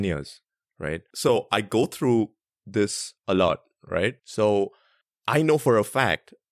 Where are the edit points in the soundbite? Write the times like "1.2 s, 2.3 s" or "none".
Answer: 3.2 s, 4.2 s

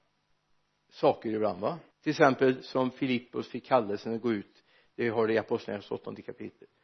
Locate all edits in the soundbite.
1.9 s

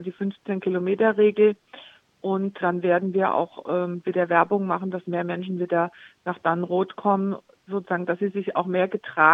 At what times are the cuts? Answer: 2.6 s

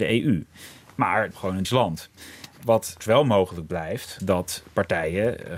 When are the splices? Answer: 1.3 s, 1.6 s, 3.0 s, 4.2 s

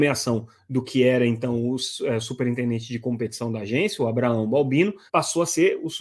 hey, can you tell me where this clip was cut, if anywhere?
5.1 s

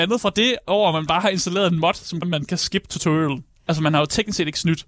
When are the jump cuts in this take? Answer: 2.2 s

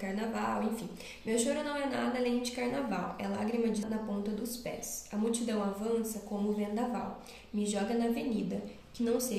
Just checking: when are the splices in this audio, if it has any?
3.8 s

